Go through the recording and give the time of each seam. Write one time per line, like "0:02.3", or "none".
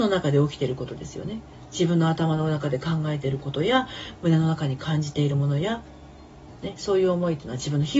none

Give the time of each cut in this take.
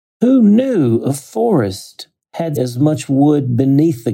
0:02.6

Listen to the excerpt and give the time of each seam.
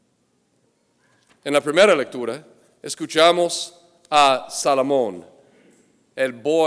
none

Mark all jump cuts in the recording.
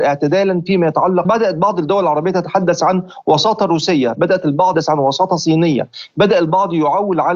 0:01.2
0:04.7

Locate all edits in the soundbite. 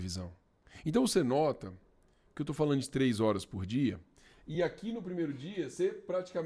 none

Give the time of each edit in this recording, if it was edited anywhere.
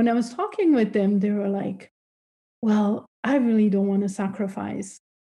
none

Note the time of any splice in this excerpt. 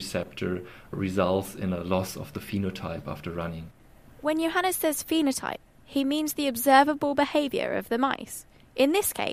none

